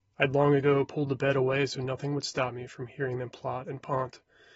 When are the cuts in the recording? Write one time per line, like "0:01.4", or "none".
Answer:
none